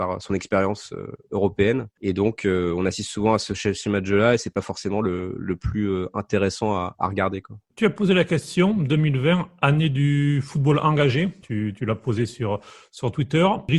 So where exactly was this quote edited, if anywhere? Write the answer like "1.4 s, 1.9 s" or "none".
7.7 s, 11.4 s